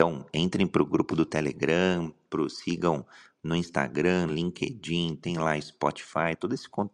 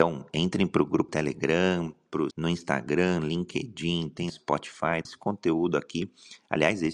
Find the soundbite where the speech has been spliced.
second; 4 cuts; at 1.1 s, 2.3 s, 4.3 s, 5.0 s

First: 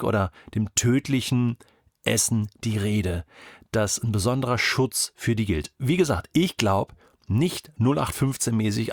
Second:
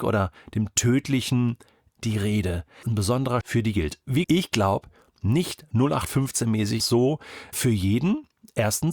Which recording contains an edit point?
second; 6 cuts; at 2.0 s, 2.8 s, 3.4 s, 4.2 s, 6.8 s, 7.5 s

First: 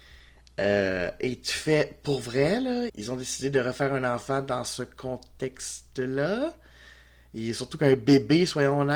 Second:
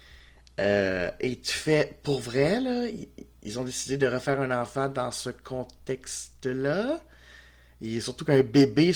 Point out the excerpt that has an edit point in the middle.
first; 1 cut; at 2.9 s

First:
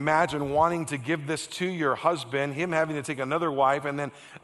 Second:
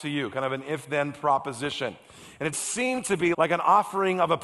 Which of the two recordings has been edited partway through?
second; 2 cuts; at 2.5 s, 3.3 s

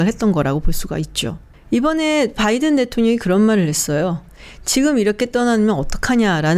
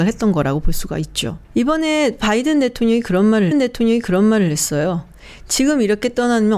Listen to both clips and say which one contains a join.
second; 2 cuts; at 1.4 s, 3.5 s

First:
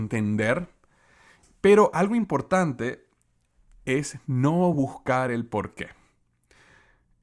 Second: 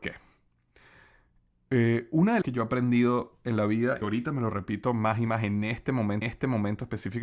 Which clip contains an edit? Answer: second; 4 cuts; at 2.4 s, 4.0 s, 5.3 s, 6.2 s

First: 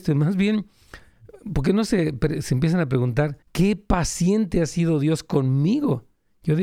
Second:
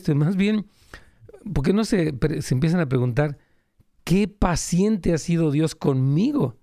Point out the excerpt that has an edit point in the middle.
first; 1 cut; at 3.4 s

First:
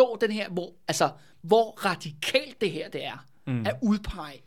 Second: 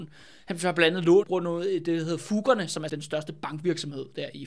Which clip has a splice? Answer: second; 2 cuts; at 1.2 s, 2.9 s

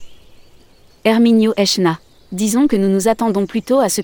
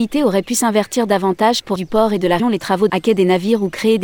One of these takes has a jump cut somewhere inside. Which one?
second; 3 cuts; at 1.8 s, 2.4 s, 2.9 s

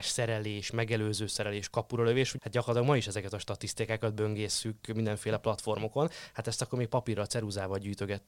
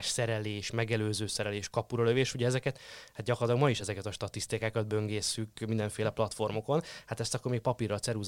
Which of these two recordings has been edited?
first; 1 cut; at 2.4 s

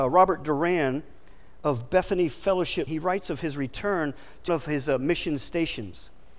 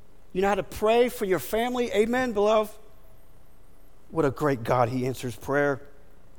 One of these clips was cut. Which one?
first; 2 cuts; at 2.9 s, 4.5 s

